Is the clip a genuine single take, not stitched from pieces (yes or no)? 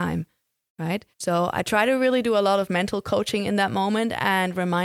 no